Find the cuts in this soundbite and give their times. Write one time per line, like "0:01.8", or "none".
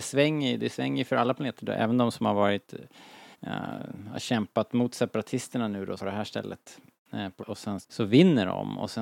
0:03.3
0:06.0
0:07.4
0:07.8